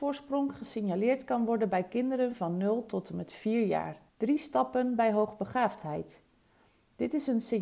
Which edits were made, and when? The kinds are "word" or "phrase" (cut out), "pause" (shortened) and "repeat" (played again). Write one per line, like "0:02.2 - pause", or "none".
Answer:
0:04.1 - pause